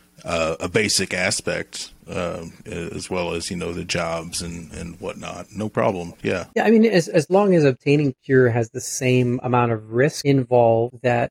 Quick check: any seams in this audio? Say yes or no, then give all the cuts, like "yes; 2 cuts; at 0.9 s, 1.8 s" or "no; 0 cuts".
yes; 1 cut; at 6.5 s